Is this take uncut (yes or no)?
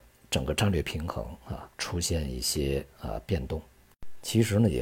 no